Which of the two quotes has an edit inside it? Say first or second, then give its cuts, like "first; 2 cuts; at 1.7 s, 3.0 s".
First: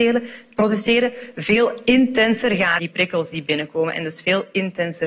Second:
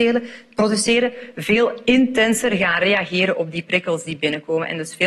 first; 1 cut; at 2.8 s